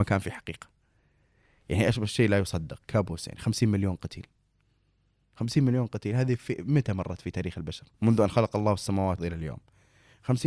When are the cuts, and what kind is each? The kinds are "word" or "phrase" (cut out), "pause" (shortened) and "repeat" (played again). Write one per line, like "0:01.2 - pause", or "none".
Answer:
0:07.9 - pause
0:09.2 - word